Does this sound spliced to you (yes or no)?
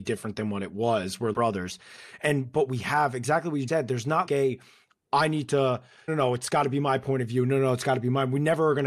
yes